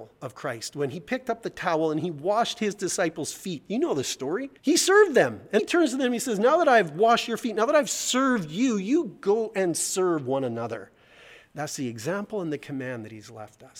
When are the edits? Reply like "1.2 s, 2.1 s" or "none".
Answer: 4.6 s, 5.6 s